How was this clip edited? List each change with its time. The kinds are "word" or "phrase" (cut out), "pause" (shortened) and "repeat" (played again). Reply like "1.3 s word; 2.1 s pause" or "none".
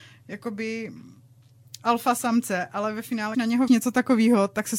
3.3 s word; 3.7 s word